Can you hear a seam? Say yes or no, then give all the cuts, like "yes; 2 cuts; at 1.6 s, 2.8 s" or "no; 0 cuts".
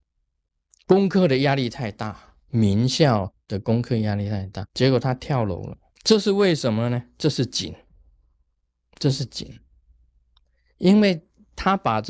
yes; 4 cuts; at 2.4 s, 4.7 s, 5.9 s, 8.4 s